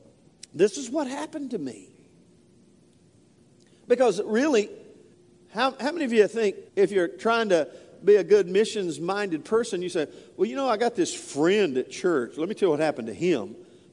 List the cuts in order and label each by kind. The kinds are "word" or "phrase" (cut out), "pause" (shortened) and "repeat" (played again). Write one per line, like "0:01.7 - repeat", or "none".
0:05.1 - pause
0:06.7 - pause